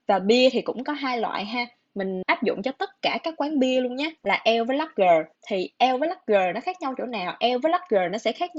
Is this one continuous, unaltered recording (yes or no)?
no